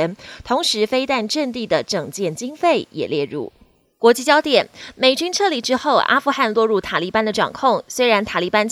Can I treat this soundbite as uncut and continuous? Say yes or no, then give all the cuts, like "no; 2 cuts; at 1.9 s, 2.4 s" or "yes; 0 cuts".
yes; 0 cuts